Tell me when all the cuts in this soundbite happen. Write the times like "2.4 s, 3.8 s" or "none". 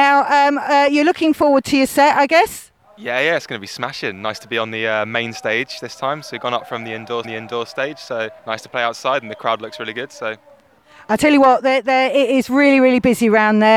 7.2 s, 8.4 s